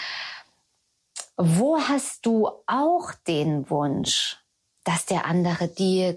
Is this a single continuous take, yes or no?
yes